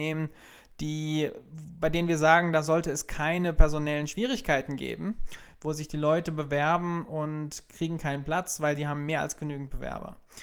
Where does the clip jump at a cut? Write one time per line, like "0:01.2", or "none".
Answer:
none